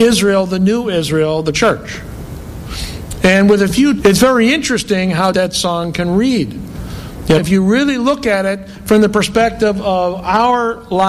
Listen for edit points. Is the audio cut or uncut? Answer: cut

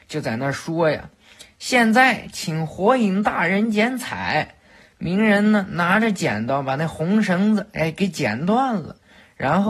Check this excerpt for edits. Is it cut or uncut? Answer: uncut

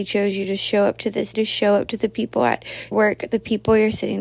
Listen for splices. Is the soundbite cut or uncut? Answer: cut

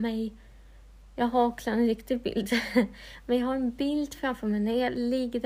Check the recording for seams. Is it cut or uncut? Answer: uncut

